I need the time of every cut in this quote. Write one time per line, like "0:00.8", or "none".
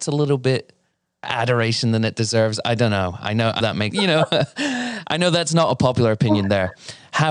0:01.2
0:03.6
0:03.9